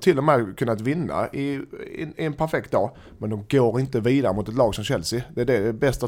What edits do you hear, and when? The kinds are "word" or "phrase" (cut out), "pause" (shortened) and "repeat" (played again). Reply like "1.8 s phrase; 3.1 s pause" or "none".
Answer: none